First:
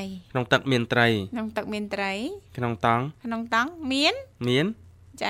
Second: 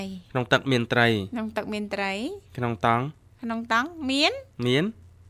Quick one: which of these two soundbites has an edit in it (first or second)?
first